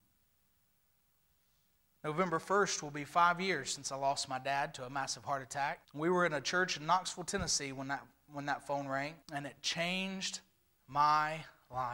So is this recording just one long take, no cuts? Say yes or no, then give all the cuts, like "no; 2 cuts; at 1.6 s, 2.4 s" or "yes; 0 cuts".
no; 2 cuts; at 5.8 s, 9.2 s